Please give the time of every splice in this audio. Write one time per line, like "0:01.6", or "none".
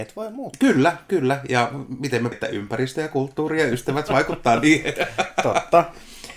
0:02.3